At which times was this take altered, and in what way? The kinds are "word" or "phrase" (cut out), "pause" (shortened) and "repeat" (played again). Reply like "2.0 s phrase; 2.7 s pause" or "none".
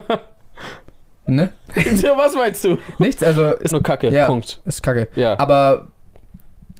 3.7 s word